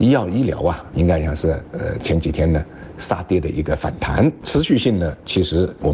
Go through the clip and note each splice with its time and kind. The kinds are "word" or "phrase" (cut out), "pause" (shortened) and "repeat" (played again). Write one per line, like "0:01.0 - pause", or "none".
none